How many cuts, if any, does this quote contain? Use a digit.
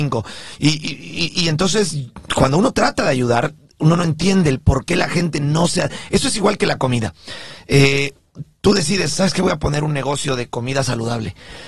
0